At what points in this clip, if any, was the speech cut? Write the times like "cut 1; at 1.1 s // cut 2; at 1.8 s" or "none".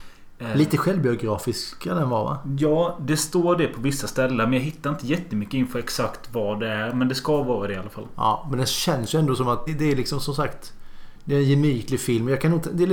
cut 1; at 9.7 s